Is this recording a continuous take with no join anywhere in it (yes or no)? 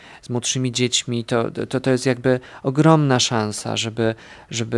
yes